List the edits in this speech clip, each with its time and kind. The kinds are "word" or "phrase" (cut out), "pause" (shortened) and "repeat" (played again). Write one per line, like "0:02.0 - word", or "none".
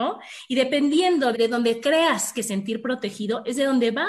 0:01.3 - phrase
0:02.3 - phrase